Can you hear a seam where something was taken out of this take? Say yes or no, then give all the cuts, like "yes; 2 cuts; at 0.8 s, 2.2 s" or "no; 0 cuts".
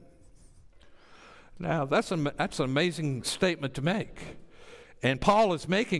no; 0 cuts